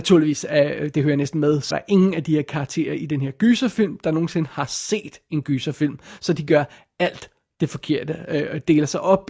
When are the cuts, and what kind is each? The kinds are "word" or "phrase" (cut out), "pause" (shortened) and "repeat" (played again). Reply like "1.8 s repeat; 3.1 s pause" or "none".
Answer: 1.7 s word